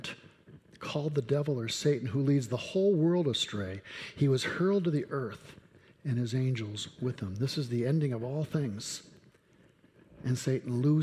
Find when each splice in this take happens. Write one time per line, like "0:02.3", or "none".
none